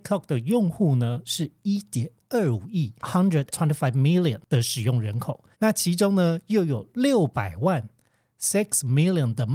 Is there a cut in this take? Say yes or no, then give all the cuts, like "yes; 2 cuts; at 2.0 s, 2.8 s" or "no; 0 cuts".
yes; 3 cuts; at 3.0 s, 3.5 s, 5.5 s